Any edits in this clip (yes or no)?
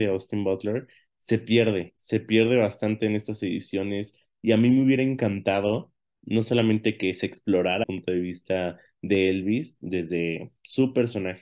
yes